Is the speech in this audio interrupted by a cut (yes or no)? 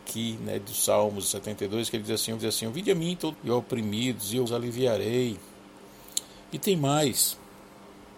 yes